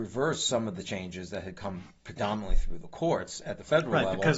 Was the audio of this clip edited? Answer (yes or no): no